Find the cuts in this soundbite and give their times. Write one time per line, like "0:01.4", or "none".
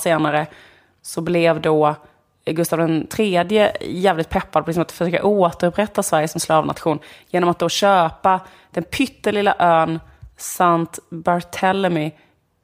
none